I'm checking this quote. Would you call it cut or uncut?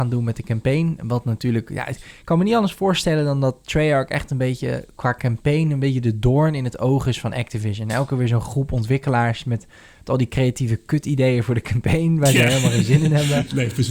uncut